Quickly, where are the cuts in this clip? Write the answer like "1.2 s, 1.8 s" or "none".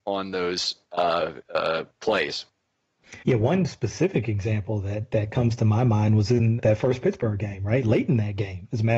3.2 s, 6.6 s